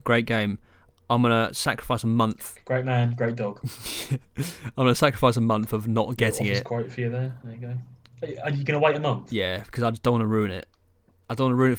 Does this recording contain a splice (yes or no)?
no